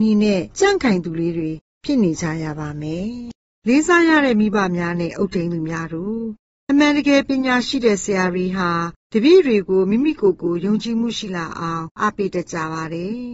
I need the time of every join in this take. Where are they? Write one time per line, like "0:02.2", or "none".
none